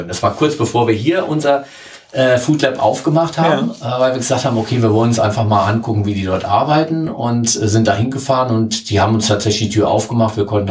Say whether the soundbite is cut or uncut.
uncut